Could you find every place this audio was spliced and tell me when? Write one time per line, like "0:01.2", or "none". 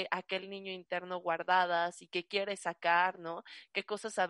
none